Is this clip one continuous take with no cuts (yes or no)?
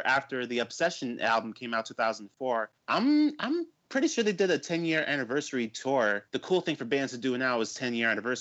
no